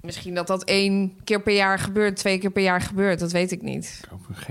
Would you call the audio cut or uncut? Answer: uncut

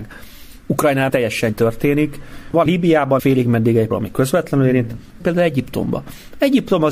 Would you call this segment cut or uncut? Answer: cut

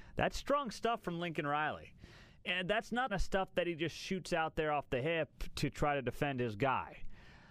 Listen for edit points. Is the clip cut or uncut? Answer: cut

